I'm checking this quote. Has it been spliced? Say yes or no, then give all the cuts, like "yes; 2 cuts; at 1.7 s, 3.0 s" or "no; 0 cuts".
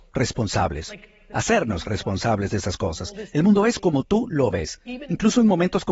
no; 0 cuts